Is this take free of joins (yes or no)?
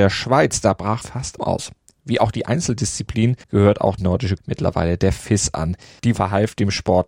no